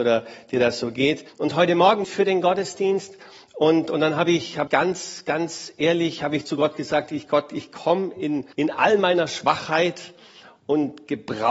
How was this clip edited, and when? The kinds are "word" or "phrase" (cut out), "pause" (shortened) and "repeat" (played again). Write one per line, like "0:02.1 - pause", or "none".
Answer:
0:01.3 - pause
0:02.0 - phrase
0:04.7 - word
0:08.5 - pause